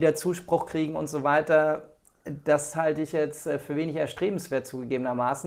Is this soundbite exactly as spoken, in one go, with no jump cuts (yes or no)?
yes